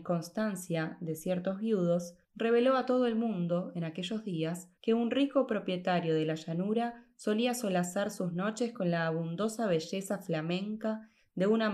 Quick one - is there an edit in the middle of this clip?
yes; 2 cuts; at 2.2 s, 4.8 s

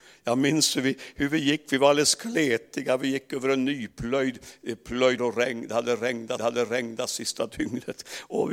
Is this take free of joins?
no; 2 cuts; at 5.2 s, 6.4 s

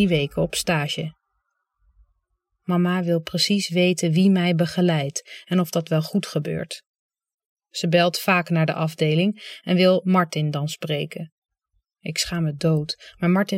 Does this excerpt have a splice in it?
no; 0 cuts

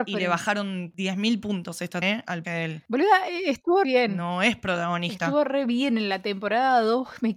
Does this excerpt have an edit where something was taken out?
yes; 3 cuts; at 2.0 s, 2.4 s, 3.8 s

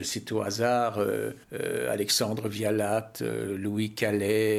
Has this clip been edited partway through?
yes; 1 cut; at 1.4 s

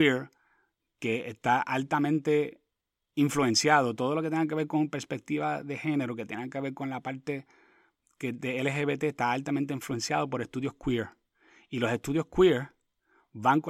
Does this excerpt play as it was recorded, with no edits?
yes; 0 cuts

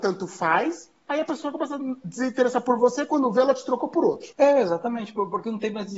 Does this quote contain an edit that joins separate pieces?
yes; 1 cut; at 4.3 s

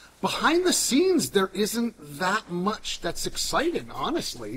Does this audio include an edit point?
no; 0 cuts

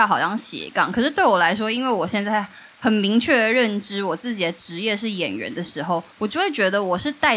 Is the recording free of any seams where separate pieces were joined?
no; 1 cut; at 6.1 s

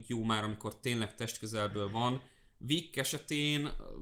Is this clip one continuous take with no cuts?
yes; 0 cuts

